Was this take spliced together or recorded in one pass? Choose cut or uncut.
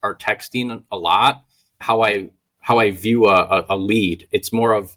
cut